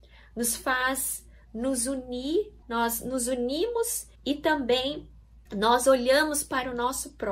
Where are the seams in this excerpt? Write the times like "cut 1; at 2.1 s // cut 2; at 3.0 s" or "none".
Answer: cut 1; at 2.6 s // cut 2; at 4.1 s // cut 3; at 5.5 s